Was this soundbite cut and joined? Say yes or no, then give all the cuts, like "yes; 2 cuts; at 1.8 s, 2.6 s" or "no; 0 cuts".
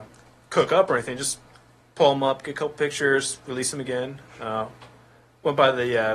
no; 0 cuts